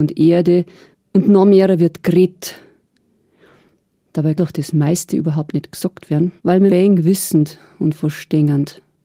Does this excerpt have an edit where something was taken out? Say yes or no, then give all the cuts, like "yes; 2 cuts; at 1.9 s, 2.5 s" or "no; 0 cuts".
yes; 4 cuts; at 0.9 s, 4.4 s, 6.4 s, 6.7 s